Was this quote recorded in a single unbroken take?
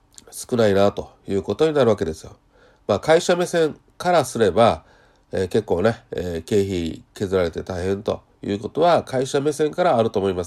yes; 0 cuts

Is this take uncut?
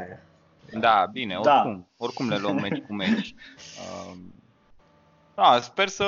no; 1 cut; at 1.9 s

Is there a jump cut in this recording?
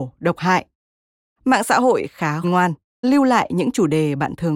yes; 2 cuts; at 2.4 s, 3.0 s

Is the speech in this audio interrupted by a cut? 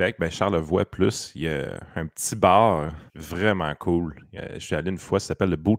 yes; 1 cut; at 3.1 s

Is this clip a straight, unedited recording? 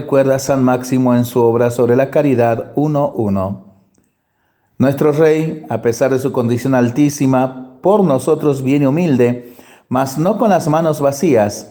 yes; 0 cuts

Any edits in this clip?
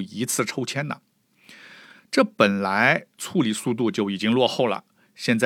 no; 0 cuts

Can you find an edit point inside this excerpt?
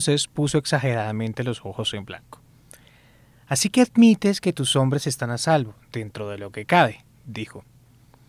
no; 0 cuts

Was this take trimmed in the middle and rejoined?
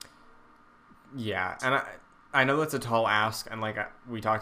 no; 0 cuts

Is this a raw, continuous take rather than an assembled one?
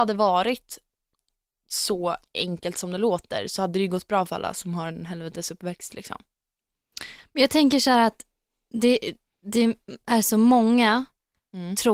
yes; 0 cuts

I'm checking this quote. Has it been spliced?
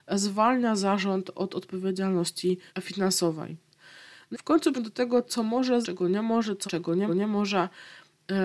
yes; 6 cuts; at 2.7 s, 4.3 s, 4.7 s, 5.8 s, 6.7 s, 7.1 s

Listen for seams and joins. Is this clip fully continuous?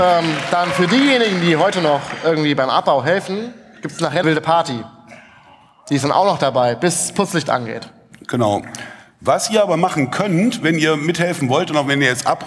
no; 1 cut; at 4.2 s

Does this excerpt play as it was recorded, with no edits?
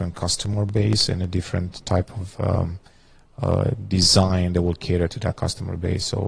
yes; 0 cuts

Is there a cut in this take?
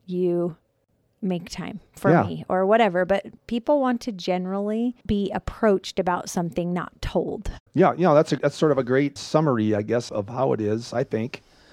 yes; 6 cuts; at 1.9 s, 5.0 s, 7.7 s, 8.4 s, 9.2 s, 10.1 s

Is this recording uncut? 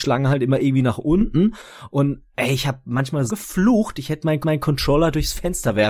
no; 2 cuts; at 3.3 s, 4.4 s

